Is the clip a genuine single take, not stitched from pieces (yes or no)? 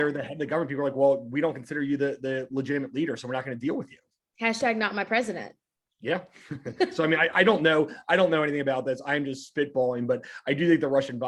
yes